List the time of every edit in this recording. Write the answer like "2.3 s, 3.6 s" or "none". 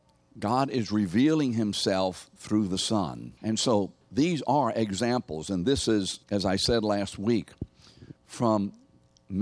3.4 s, 4.0 s, 6.2 s, 8.2 s